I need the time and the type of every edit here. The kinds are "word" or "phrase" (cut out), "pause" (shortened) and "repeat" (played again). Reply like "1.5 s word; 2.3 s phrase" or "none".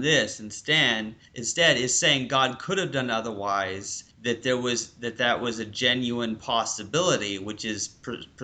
1.3 s pause; 4.1 s pause